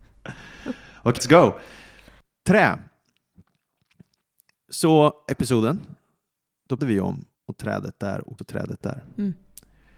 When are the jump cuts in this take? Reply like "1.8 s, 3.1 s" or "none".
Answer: 1.2 s, 5.3 s, 6.8 s, 7.3 s, 8.4 s